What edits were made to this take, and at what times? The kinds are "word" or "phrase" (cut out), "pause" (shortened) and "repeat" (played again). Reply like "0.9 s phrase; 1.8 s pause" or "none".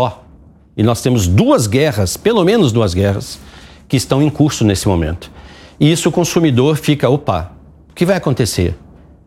none